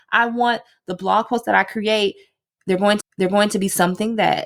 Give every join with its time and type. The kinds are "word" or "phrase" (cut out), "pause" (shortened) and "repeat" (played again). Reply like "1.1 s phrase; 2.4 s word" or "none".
3.0 s repeat